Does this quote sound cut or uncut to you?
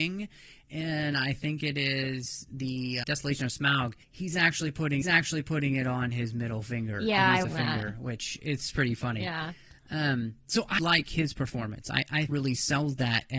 cut